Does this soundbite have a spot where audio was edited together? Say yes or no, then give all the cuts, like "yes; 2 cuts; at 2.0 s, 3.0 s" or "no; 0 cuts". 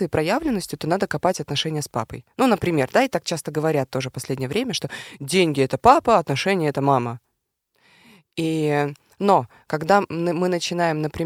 no; 0 cuts